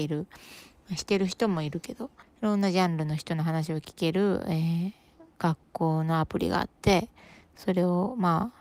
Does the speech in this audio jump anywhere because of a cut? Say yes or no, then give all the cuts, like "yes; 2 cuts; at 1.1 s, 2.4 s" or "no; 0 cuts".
yes; 1 cut; at 2.2 s